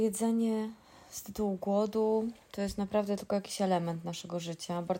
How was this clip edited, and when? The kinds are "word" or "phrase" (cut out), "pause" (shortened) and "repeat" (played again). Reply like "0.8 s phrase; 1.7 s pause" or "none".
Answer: none